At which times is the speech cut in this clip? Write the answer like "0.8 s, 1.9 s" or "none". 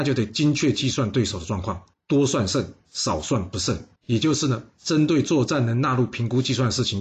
1.9 s, 4.0 s